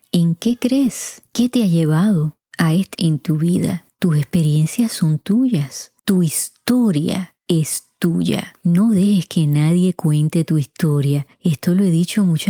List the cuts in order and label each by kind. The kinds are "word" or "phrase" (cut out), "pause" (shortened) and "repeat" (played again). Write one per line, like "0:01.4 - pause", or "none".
0:02.9 - word
0:06.0 - pause